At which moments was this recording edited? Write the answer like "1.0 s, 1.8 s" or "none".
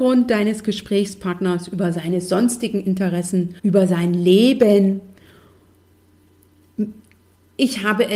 3.6 s